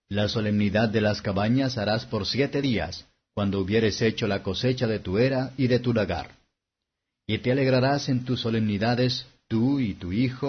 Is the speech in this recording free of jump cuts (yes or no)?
yes